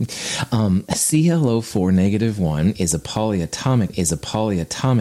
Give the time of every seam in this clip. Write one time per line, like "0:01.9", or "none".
0:03.9

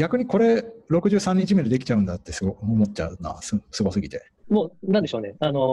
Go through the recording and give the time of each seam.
0:04.4

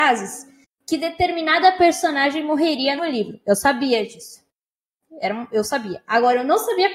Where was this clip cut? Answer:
0:03.0

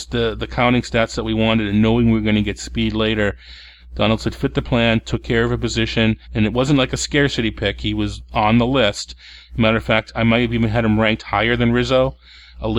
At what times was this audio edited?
0:06.2

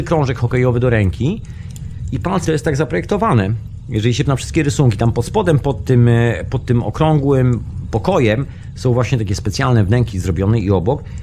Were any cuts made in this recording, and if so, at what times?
0:02.4
0:04.3

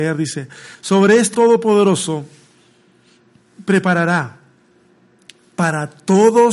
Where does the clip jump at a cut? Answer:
0:01.3

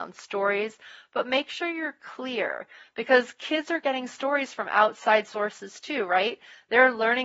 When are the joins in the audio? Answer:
none

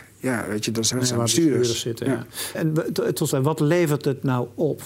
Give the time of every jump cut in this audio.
0:00.9
0:02.5
0:03.3

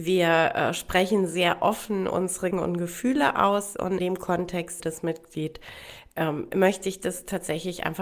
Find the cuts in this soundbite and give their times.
0:02.5
0:04.0
0:04.8

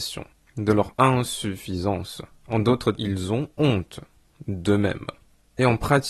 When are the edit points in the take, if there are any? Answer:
0:02.9
0:03.5

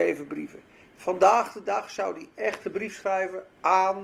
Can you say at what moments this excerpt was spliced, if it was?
none

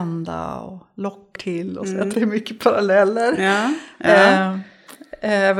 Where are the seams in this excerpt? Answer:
0:01.4
0:02.1

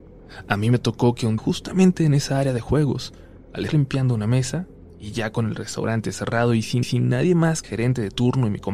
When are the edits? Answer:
0:01.4
0:03.7
0:06.8
0:07.6

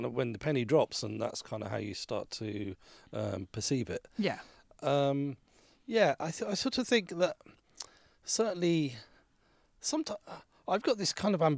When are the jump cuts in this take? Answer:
none

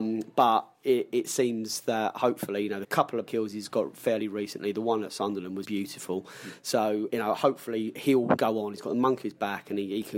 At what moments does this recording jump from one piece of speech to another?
0:02.8
0:03.3
0:05.6
0:07.1
0:08.4
0:09.2

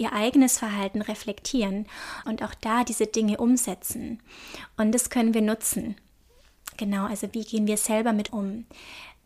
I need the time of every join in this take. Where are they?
0:02.2
0:08.3

